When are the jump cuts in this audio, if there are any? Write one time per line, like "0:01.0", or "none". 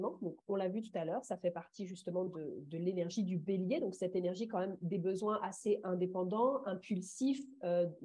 none

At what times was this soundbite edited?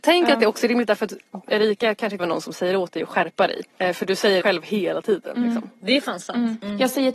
0:01.4
0:02.2
0:03.7
0:04.4

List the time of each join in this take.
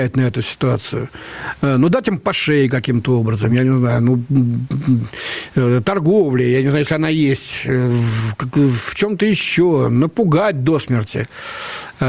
none

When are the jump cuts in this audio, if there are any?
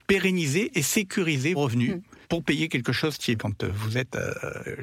0:01.5
0:02.2
0:03.4

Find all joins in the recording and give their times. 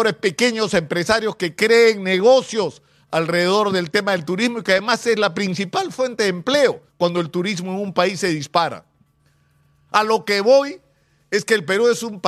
0:06.9
0:09.2

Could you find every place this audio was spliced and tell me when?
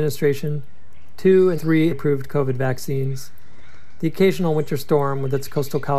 0:01.6
0:01.9

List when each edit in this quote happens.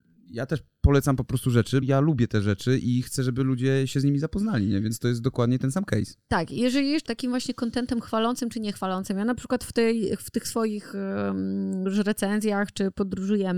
0:01.8
0:07.1

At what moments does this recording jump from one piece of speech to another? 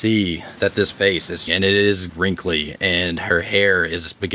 0:00.9
0:01.5
0:02.1

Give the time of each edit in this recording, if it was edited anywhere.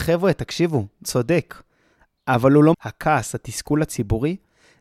0:01.0
0:02.7

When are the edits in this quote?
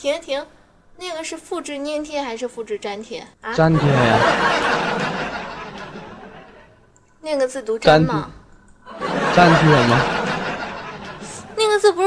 0:03.3

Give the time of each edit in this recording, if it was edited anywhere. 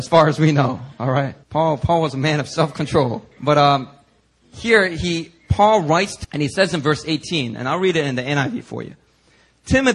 0:01.4
0:03.3
0:06.2

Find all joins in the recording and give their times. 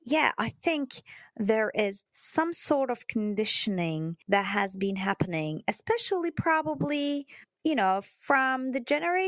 0:02.1
0:04.2

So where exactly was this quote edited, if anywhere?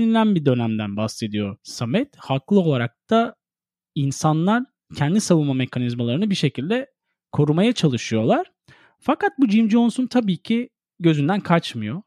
none

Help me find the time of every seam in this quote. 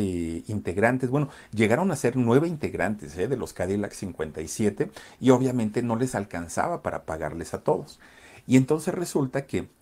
none

